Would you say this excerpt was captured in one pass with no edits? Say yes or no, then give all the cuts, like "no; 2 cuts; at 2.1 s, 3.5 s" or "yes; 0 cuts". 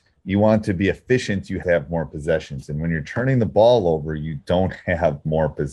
no; 1 cut; at 1.6 s